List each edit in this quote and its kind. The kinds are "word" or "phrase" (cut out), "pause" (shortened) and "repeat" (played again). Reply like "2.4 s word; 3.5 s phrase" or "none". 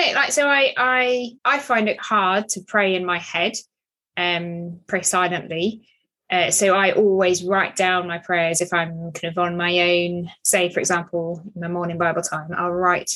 1.4 s pause; 2.0 s word